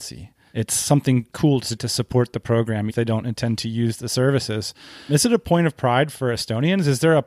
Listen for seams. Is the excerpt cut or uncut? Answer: cut